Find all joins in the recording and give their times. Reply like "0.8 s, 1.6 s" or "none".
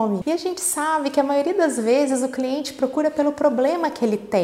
none